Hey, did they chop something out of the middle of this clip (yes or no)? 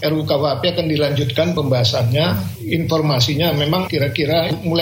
no